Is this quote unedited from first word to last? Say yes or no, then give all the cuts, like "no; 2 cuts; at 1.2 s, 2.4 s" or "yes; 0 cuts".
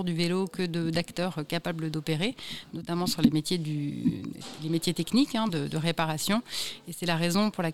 yes; 0 cuts